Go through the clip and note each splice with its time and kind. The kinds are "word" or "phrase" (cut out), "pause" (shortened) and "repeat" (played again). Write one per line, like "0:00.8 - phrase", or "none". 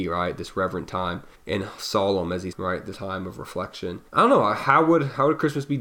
0:01.3 - pause
0:02.5 - word
0:02.9 - word
0:04.1 - pause

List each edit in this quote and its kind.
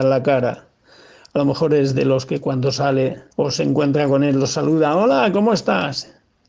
0:03.3 - pause

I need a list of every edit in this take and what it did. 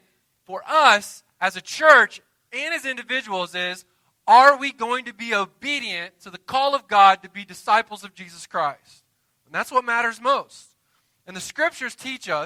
none

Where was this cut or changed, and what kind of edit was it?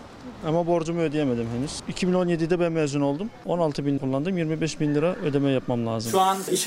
0:04.0 - word

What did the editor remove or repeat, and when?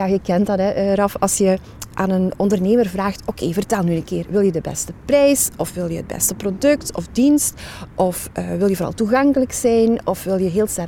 none

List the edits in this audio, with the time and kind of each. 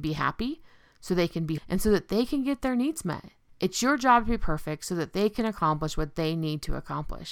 0:01.6 - word

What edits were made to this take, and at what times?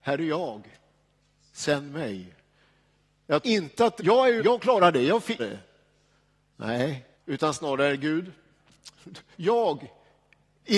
0:03.4 - word
0:04.0 - phrase
0:04.4 - word
0:05.4 - phrase
0:07.1 - pause
0:09.3 - word

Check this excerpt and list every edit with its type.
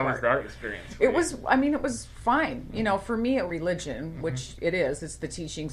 0:03.5 - phrase

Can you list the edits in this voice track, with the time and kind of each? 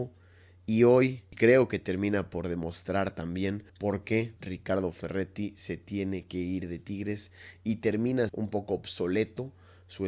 0:03.7 - pause
0:04.4 - pause
0:08.3 - phrase

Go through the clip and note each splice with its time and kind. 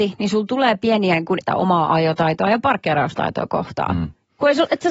0:01.4 - word

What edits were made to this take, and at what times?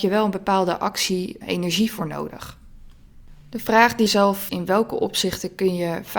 0:01.4 - word
0:04.1 - word
0:04.5 - phrase

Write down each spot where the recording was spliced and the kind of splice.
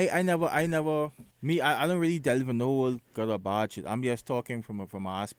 0:01.3 - pause

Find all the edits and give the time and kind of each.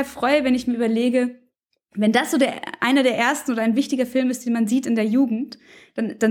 none

